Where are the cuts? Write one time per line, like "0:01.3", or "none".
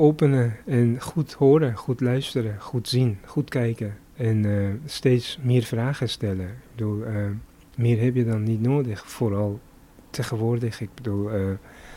none